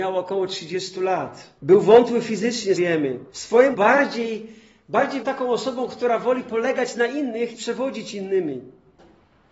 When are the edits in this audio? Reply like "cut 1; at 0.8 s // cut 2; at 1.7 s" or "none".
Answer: cut 1; at 1.6 s // cut 2; at 2.7 s // cut 3; at 3.3 s // cut 4; at 3.7 s // cut 5; at 5.2 s // cut 6; at 7.5 s